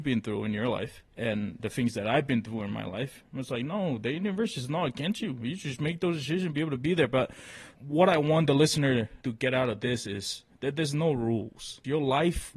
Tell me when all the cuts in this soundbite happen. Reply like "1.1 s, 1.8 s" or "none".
1.1 s, 7.7 s